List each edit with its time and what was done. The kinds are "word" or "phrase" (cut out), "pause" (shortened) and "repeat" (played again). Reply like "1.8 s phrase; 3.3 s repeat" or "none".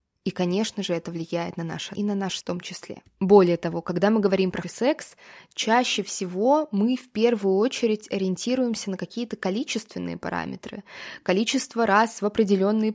2.0 s phrase; 2.4 s word; 4.6 s word